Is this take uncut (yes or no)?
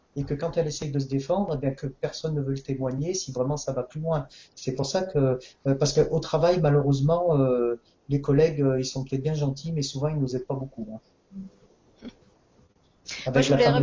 yes